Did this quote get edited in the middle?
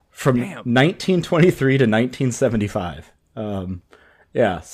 no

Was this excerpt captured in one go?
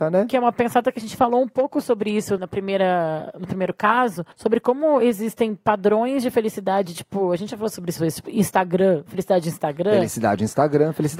no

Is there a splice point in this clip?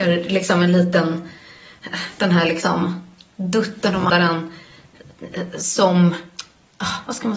yes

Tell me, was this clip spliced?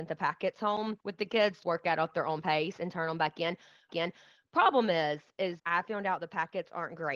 yes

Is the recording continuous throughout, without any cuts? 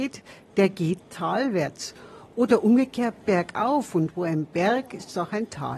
no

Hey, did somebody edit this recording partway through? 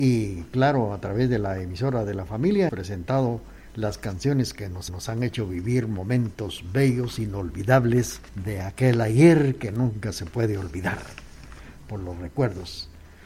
yes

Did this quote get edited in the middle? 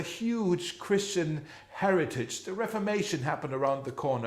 no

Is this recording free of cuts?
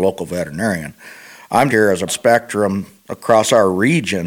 no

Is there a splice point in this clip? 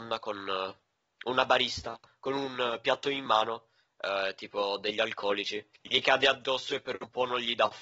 no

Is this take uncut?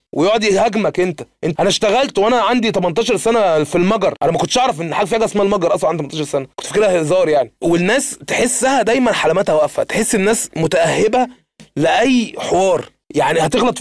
no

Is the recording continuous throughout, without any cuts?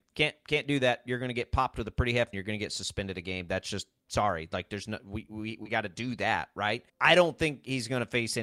no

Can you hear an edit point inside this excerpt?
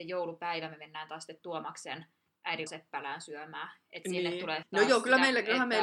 yes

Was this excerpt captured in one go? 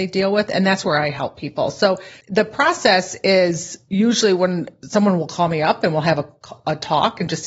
no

